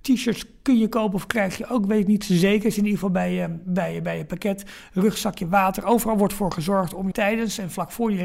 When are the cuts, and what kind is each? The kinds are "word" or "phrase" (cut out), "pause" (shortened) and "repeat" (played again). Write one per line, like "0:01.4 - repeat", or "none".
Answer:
0:07.1 - word